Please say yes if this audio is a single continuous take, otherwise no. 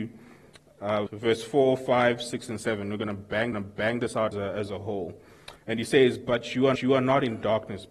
no